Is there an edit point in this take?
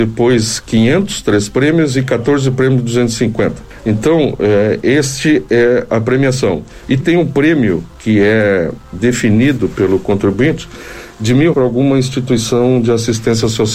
yes; 3 cuts; at 5.9 s, 7.0 s, 11.5 s

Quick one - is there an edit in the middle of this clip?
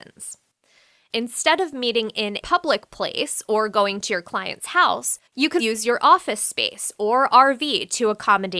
yes; 3 cuts; at 2.4 s, 5.3 s, 5.6 s

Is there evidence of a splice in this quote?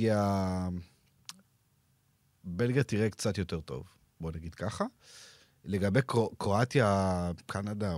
no; 0 cuts

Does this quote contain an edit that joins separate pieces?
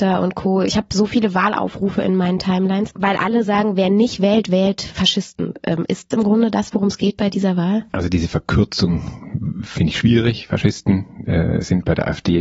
yes; 1 cut; at 6.1 s

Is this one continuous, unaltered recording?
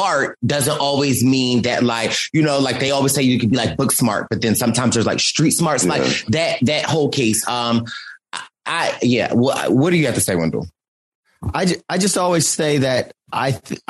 yes; 0 cuts

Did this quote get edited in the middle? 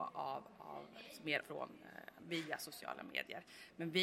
yes; 2 cuts; at 1.4 s, 2.2 s

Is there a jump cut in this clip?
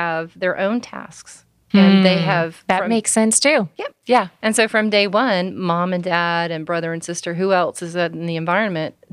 no; 0 cuts

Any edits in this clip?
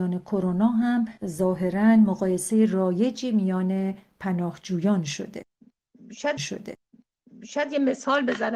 yes; 2 cuts; at 1.2 s, 6.4 s

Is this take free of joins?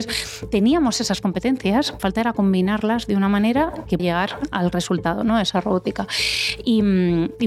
no; 2 cuts; at 2.0 s, 4.0 s

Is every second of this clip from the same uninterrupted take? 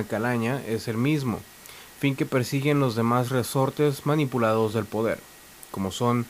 yes; 0 cuts

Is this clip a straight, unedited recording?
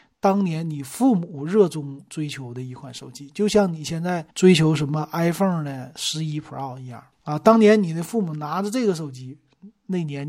no; 2 cuts; at 4.3 s, 7.1 s

